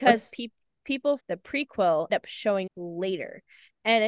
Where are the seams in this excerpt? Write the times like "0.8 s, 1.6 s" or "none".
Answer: 1.2 s, 2.1 s, 2.7 s